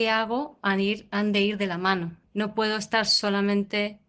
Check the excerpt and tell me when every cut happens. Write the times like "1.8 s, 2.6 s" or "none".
2.3 s